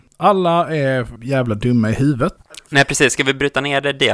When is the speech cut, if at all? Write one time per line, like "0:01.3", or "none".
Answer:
0:01.2

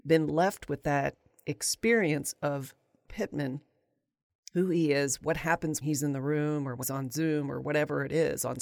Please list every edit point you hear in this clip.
0:03.0
0:05.8
0:06.8

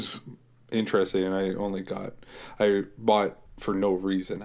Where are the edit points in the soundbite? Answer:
0:03.5

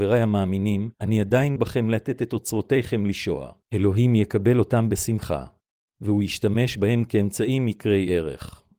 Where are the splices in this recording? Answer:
0:00.9
0:01.6
0:03.6
0:05.8

